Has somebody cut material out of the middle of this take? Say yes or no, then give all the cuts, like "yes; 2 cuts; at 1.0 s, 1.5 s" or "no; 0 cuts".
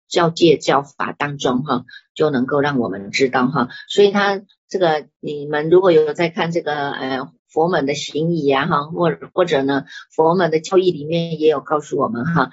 yes; 1 cut; at 5.1 s